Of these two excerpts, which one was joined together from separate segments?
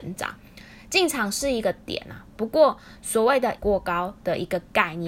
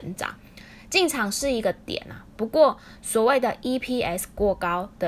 first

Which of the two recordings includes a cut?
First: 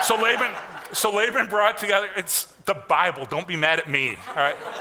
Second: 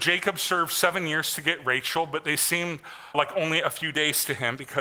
second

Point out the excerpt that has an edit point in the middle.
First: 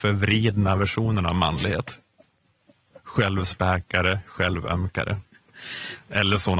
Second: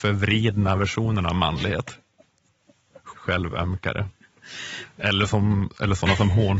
second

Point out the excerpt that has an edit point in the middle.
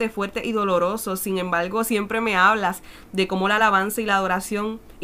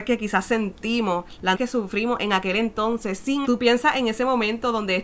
second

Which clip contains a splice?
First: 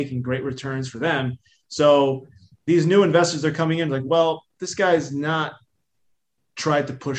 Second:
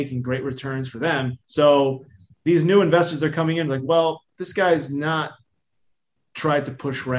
second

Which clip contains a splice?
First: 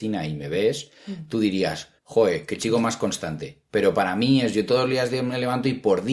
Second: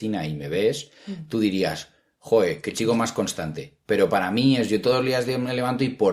first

